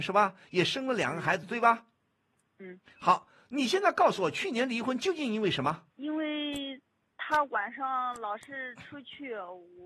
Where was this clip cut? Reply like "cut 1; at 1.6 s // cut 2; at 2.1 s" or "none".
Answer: cut 1; at 5.9 s